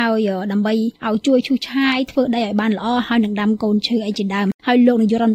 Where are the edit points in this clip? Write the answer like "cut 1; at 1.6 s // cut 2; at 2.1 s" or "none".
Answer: cut 1; at 1.0 s

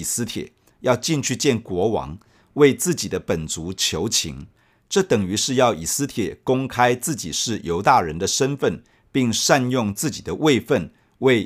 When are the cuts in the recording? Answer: none

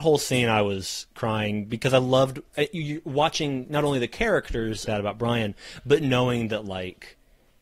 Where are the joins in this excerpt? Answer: cut 1; at 4.9 s

